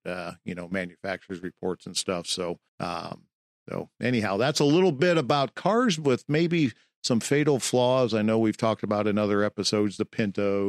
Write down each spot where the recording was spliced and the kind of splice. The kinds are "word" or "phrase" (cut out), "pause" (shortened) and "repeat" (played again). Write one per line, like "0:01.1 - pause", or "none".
0:02.7 - pause